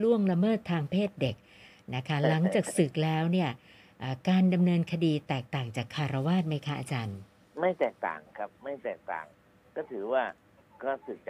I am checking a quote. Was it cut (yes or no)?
no